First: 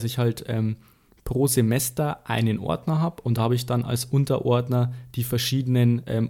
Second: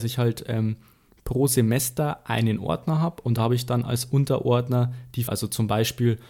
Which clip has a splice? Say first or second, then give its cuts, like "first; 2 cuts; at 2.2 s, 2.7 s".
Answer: second; 1 cut; at 5.3 s